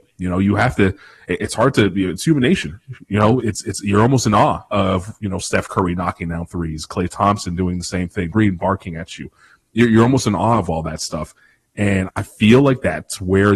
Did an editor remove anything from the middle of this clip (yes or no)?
yes